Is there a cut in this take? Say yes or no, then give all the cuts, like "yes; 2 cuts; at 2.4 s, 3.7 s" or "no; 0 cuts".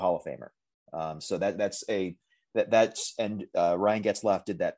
no; 0 cuts